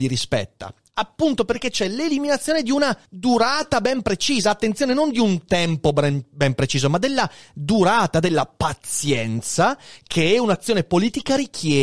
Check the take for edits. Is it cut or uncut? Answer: cut